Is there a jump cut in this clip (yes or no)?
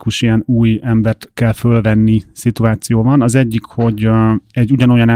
no